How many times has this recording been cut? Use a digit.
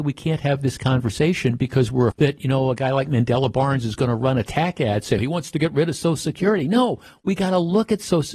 2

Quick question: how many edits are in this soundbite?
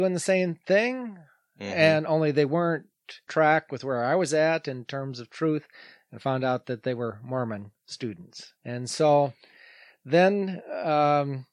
2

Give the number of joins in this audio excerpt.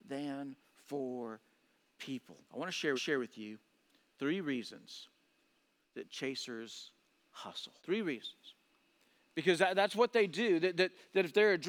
4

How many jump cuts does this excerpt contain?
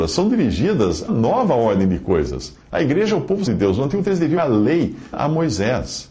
6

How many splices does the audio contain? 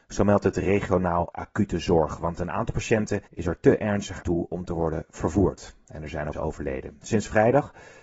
4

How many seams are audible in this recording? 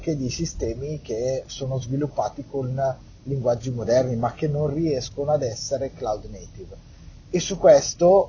0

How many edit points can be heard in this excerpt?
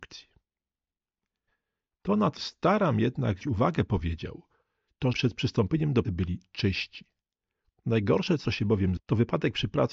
6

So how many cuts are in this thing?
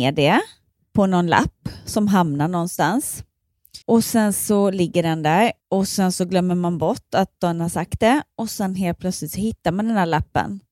2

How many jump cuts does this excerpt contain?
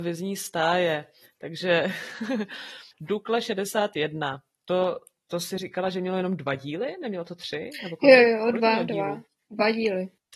0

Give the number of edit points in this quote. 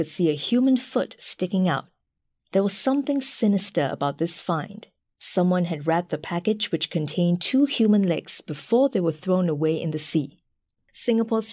0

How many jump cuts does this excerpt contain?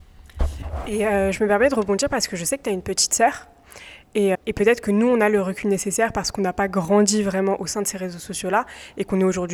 1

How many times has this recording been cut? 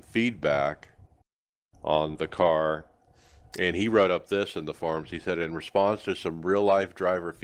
1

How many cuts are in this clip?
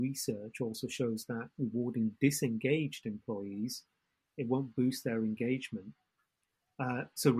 0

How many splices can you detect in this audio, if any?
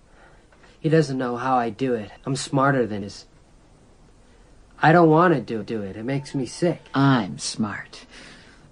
4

